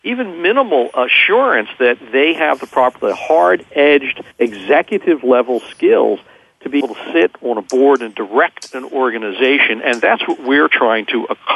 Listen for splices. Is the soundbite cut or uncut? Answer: cut